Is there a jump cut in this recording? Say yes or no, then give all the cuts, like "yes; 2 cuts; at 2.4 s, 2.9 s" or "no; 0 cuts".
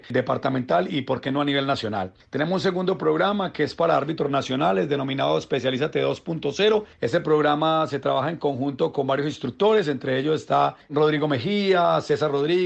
no; 0 cuts